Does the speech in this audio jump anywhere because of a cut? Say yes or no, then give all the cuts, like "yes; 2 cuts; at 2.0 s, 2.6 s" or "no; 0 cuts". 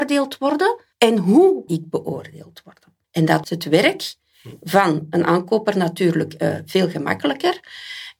yes; 4 cuts; at 0.9 s, 1.7 s, 3.0 s, 3.4 s